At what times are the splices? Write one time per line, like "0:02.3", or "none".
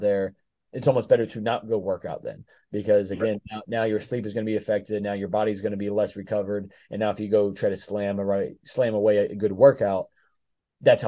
none